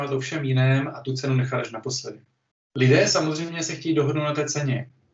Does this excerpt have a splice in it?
yes; 1 cut; at 2.5 s

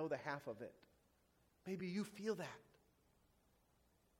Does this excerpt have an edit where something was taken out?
no; 0 cuts

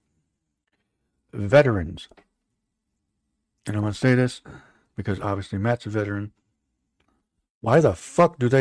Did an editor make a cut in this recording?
no; 0 cuts

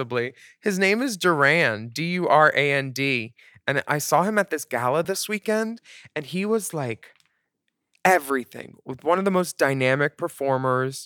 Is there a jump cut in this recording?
no; 0 cuts

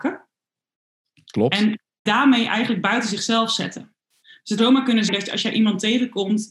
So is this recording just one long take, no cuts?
no; 3 cuts; at 2.1 s, 4.6 s, 5.1 s

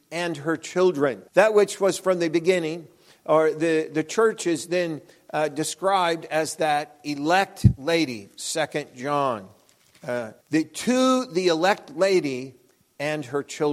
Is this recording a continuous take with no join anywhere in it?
no; 2 cuts; at 1.3 s, 10.4 s

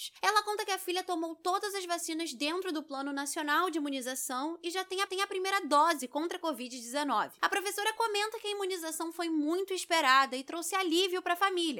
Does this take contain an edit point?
yes; 1 cut; at 5.1 s

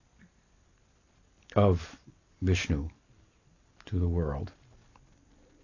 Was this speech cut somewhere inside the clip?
no; 0 cuts

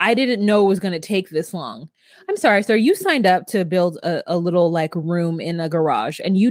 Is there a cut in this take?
no; 0 cuts

